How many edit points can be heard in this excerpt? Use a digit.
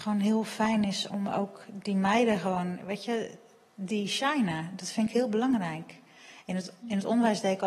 1